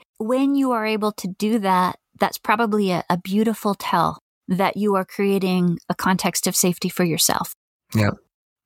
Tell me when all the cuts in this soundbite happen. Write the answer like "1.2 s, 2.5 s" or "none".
none